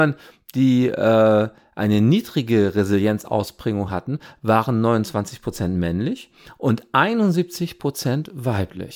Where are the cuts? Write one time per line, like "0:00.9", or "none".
none

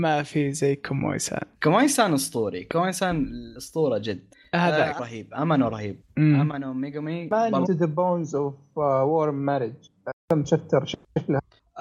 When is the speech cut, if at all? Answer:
0:01.5
0:05.0
0:06.0
0:07.6
0:10.2

